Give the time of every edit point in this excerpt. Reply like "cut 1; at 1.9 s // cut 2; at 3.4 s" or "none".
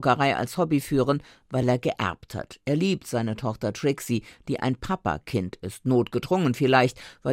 none